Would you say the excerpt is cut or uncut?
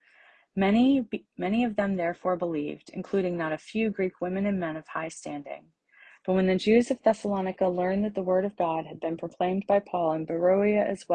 uncut